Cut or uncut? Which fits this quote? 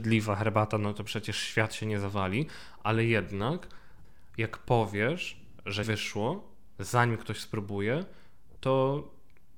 cut